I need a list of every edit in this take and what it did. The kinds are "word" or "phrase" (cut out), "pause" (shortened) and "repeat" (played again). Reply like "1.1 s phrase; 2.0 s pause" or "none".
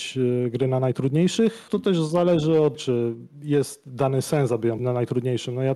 1.7 s word; 2.7 s word; 4.8 s word